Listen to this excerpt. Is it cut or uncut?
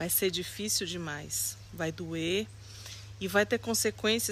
uncut